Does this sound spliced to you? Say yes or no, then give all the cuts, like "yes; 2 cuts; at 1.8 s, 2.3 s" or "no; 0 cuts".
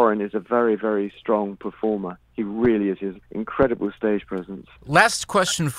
yes; 3 cuts; at 2.2 s, 3.2 s, 4.8 s